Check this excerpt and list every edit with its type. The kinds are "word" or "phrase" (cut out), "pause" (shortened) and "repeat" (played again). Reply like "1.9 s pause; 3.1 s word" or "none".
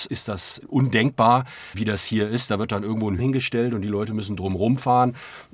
3.2 s word